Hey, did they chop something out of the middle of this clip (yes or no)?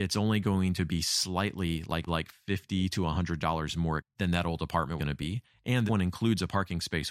yes